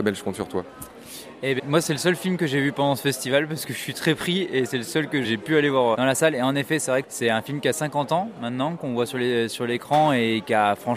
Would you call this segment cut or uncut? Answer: cut